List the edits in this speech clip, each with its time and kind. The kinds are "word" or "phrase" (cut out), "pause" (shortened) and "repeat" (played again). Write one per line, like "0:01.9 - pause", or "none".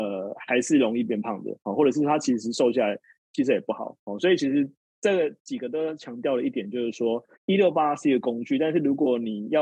0:04.9 - pause
0:07.3 - pause